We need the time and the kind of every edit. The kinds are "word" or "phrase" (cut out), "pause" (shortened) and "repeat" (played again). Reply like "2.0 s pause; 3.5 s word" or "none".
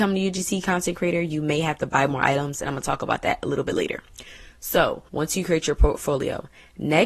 5.1 s pause

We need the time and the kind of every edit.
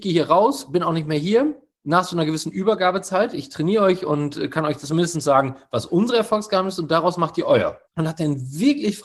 7.9 s pause

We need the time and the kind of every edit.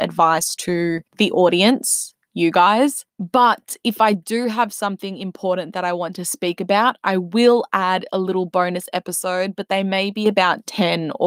1.1 s pause; 3.1 s pause

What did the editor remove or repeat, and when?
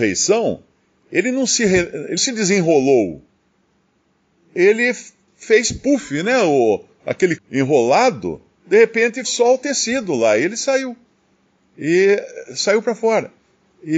2.2 s word; 7.4 s word; 9.2 s word

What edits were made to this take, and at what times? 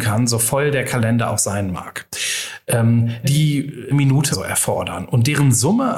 3.2 s word; 3.9 s word; 4.3 s word

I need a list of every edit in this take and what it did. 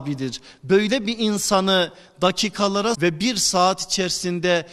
2.9 s word

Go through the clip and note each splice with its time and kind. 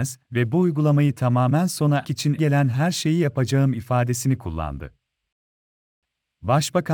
2.0 s word; 2.4 s word

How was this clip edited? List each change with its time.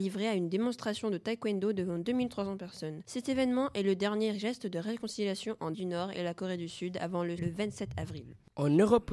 5.7 s phrase; 7.4 s word

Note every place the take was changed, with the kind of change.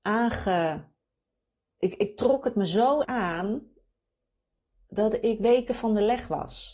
3.0 s word

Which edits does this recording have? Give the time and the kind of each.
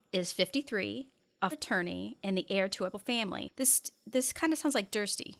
1.5 s word; 2.9 s word

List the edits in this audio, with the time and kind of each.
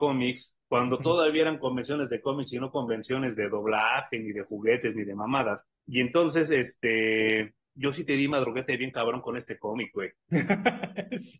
5.7 s pause

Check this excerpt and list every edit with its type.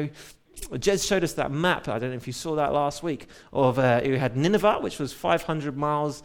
none

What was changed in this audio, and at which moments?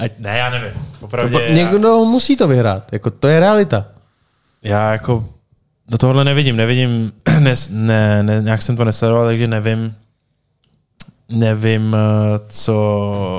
none

